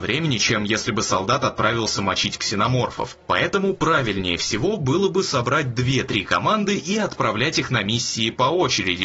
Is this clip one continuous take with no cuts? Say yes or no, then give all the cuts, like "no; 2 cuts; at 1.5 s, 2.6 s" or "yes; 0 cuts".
yes; 0 cuts